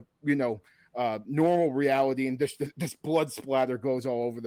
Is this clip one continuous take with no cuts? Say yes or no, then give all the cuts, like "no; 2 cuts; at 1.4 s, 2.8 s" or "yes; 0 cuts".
yes; 0 cuts